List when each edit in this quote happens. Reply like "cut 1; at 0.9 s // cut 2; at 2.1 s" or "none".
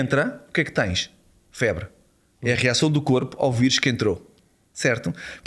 none